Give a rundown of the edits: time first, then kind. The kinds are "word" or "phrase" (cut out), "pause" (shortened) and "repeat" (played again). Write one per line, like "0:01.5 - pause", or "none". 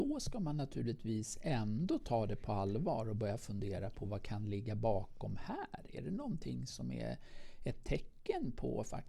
none